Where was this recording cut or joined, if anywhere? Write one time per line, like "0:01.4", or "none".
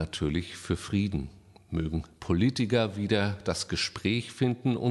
none